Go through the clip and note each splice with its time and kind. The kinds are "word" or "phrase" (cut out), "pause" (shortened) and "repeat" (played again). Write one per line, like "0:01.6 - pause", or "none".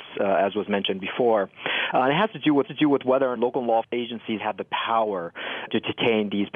0:02.6 - repeat
0:03.4 - phrase
0:03.8 - word
0:04.4 - word
0:05.7 - word